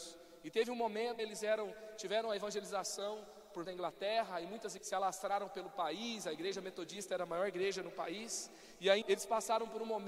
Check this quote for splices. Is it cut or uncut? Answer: cut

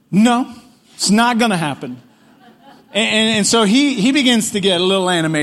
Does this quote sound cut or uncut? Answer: uncut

